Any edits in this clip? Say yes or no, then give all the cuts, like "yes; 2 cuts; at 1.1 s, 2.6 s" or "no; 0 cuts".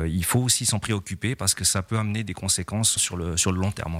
yes; 1 cut; at 3.0 s